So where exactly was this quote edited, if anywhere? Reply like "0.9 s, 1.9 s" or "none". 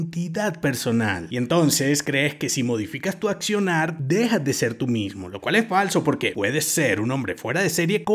none